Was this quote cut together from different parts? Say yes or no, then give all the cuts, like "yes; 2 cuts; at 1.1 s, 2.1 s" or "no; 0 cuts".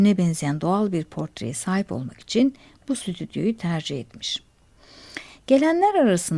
no; 0 cuts